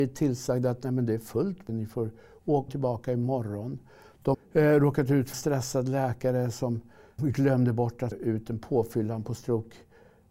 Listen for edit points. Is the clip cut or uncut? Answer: cut